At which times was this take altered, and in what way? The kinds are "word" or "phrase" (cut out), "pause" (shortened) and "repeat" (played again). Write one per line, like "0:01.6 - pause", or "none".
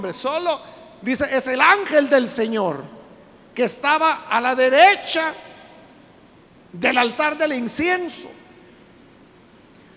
none